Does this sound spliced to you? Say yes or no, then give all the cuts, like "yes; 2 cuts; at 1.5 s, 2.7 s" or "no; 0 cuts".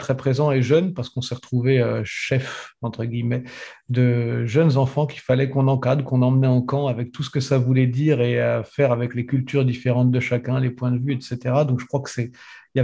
no; 0 cuts